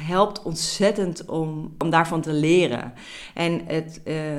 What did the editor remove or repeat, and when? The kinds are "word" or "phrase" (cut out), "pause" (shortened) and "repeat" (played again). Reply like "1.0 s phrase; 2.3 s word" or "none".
none